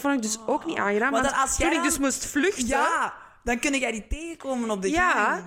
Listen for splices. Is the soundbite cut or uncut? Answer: uncut